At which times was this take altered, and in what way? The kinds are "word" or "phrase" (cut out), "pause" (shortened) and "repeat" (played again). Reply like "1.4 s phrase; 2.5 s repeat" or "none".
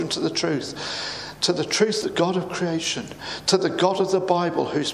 2.0 s word